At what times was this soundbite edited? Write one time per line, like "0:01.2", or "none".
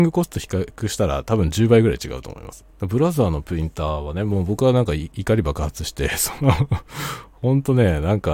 0:02.7